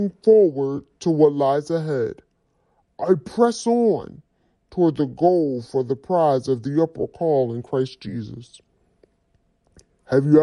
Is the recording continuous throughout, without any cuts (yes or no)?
yes